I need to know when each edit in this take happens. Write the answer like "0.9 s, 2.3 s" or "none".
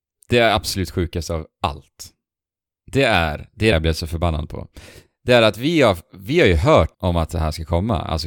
3.7 s, 6.9 s